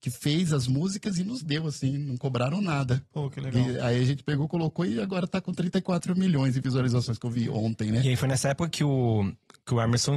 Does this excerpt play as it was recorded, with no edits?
yes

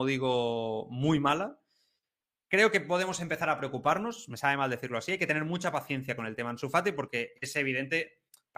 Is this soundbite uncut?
yes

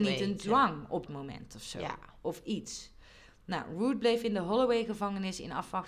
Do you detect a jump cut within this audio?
yes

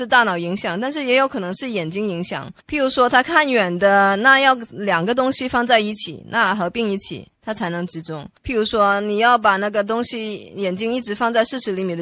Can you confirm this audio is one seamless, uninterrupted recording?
no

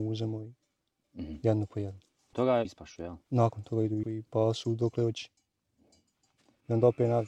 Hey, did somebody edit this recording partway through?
yes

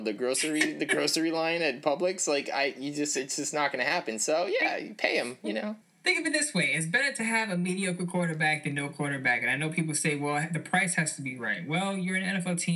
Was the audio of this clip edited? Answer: yes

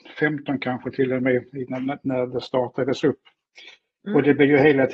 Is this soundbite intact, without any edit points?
yes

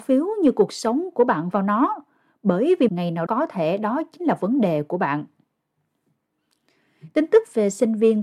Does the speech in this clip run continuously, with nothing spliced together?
no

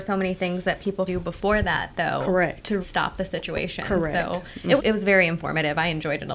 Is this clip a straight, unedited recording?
no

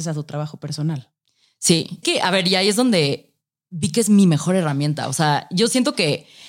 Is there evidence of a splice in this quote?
yes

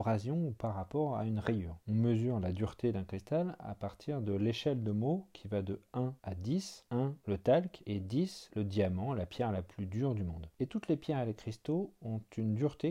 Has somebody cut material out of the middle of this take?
no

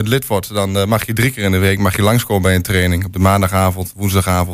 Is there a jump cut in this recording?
no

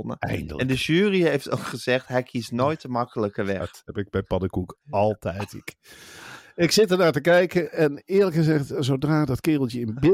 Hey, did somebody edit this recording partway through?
no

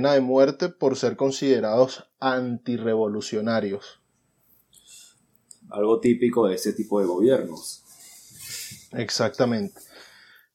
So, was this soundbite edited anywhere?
no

